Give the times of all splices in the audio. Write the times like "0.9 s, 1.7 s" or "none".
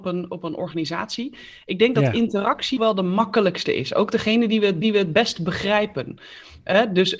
2.8 s, 4.8 s